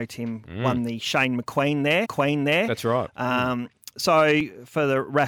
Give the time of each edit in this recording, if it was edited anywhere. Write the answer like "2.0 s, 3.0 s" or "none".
2.0 s